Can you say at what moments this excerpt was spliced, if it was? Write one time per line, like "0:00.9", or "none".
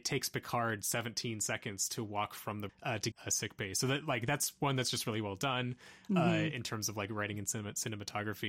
0:02.7
0:03.1